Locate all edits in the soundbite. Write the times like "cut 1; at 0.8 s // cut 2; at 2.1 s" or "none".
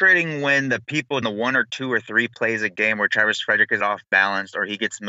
cut 1; at 1.2 s // cut 2; at 3.8 s